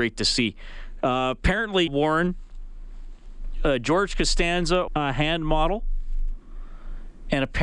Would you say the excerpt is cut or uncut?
cut